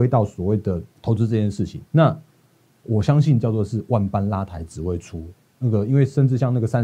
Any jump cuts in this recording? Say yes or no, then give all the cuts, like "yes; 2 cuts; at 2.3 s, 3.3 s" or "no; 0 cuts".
yes; 2 cuts; at 0.9 s, 1.9 s